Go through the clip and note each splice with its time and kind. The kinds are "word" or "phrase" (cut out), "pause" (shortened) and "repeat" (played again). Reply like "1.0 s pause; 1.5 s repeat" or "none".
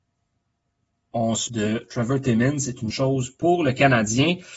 1.5 s word; 2.9 s word